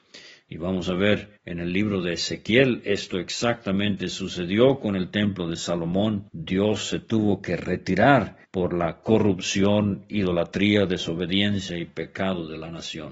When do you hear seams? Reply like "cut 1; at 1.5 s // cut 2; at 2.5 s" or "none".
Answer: cut 1; at 1.4 s // cut 2; at 6.3 s // cut 3; at 8.4 s